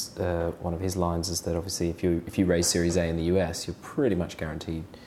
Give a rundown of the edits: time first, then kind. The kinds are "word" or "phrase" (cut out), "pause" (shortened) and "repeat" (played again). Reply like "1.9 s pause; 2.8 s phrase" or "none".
none